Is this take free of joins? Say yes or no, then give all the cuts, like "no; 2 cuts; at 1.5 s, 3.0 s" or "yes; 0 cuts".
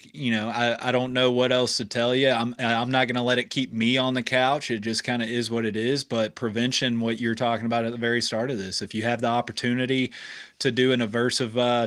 yes; 0 cuts